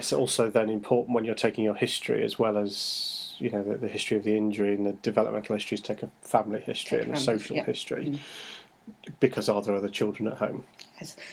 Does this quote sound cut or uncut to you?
uncut